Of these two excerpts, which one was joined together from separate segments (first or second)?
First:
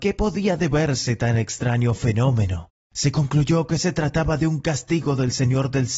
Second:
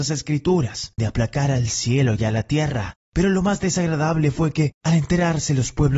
second